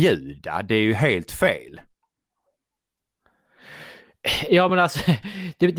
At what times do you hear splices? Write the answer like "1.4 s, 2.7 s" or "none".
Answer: none